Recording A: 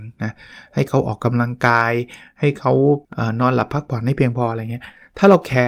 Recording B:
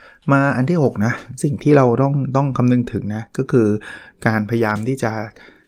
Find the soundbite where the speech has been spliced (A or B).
A